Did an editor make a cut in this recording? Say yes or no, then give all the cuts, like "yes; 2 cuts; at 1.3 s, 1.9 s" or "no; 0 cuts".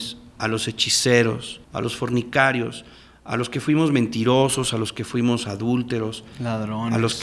yes; 1 cut; at 1.6 s